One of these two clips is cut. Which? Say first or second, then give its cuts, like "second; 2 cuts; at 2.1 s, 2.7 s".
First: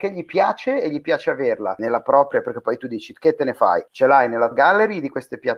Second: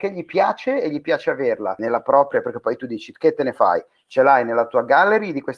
first; 2 cuts; at 3.9 s, 4.5 s